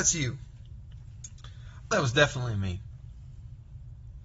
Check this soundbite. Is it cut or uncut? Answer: cut